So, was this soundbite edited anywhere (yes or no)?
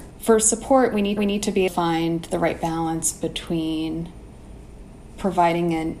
yes